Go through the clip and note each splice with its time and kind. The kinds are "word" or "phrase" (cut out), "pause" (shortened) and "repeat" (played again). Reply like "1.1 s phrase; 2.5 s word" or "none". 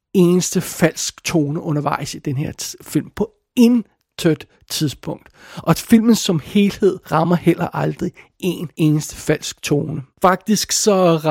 7.0 s pause; 8.7 s pause; 10.1 s pause